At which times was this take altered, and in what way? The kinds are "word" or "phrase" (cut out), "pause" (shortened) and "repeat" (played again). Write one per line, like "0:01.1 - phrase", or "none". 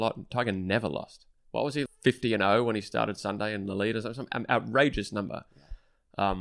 0:01.9 - word